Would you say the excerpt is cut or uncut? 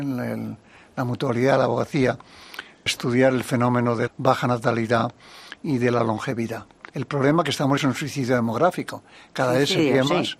cut